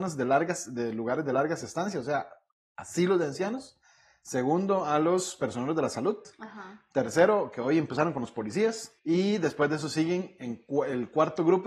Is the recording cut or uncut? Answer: cut